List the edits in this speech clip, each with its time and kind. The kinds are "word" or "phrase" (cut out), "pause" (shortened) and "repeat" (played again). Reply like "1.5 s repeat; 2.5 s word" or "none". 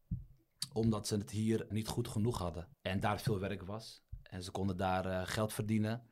1.7 s word; 2.7 s pause